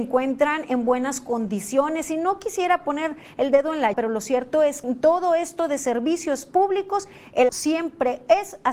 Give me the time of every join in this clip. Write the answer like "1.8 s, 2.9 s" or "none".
3.9 s, 4.8 s, 7.5 s